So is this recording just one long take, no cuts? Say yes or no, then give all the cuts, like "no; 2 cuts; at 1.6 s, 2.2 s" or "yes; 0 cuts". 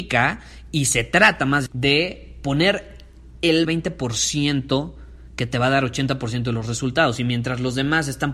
no; 2 cuts; at 1.7 s, 3.6 s